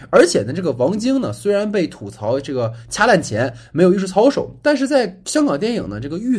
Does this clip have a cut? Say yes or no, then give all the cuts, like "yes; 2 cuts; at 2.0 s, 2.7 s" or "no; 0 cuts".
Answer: no; 0 cuts